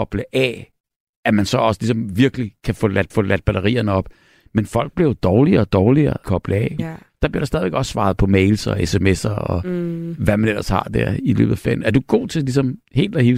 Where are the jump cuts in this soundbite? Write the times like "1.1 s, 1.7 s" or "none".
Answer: 3.1 s, 6.2 s, 6.8 s